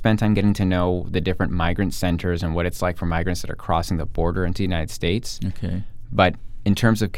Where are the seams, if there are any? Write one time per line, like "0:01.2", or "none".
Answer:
none